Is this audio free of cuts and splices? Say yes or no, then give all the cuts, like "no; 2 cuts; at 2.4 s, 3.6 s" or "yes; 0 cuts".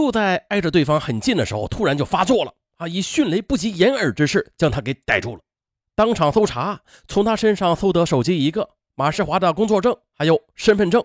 yes; 0 cuts